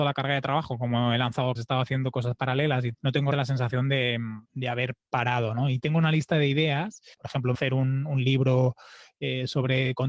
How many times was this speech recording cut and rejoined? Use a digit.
6